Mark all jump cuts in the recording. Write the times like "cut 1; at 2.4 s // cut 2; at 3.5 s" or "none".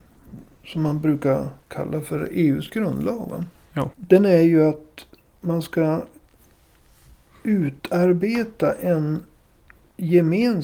none